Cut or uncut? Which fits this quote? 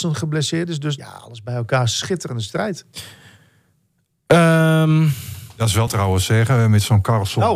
cut